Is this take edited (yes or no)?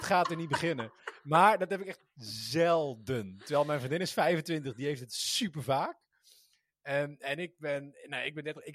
no